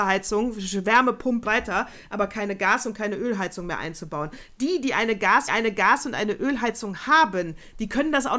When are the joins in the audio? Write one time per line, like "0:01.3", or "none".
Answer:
0:01.4
0:05.5